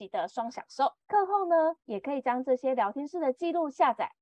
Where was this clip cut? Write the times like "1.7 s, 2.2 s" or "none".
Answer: 1.0 s, 1.8 s